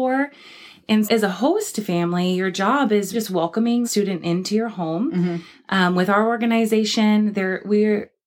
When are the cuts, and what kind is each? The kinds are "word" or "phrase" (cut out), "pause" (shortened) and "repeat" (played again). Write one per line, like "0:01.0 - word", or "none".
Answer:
0:01.0 - word
0:03.1 - word
0:03.8 - word